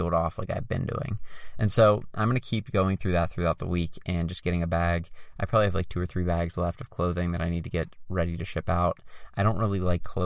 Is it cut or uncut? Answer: uncut